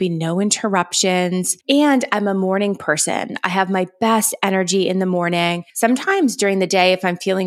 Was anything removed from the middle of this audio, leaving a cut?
yes; 2 cuts; at 1.6 s, 5.7 s

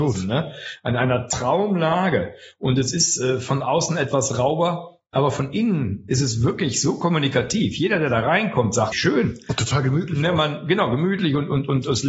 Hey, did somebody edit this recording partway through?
yes; 1 cut; at 8.9 s

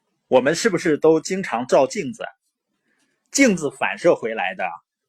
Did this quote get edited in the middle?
no; 0 cuts

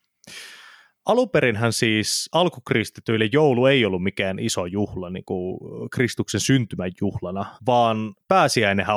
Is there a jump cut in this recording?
yes; 1 cut; at 7.6 s

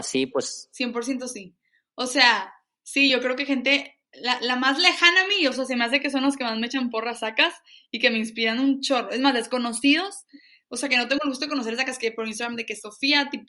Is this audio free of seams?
yes; 0 cuts

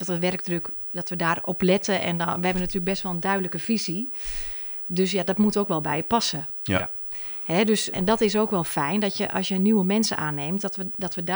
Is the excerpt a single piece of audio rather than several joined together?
no; 1 cut; at 7.9 s

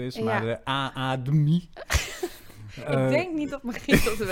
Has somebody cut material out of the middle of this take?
no; 0 cuts

